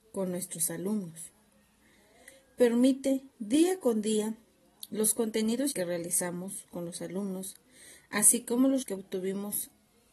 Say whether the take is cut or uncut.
cut